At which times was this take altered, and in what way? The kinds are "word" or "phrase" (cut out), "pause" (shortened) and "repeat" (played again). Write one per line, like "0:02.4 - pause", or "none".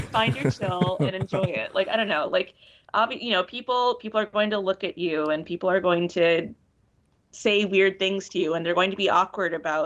none